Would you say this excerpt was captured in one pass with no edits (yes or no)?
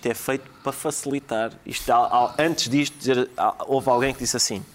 yes